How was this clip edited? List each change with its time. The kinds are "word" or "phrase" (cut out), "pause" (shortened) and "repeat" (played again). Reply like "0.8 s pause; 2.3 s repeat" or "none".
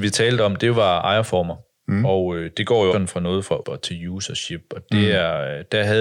2.9 s word; 3.6 s word